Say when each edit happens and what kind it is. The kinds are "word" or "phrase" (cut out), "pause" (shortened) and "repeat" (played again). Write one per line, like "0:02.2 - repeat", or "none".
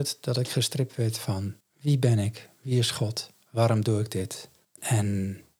0:01.6 - pause
0:04.6 - pause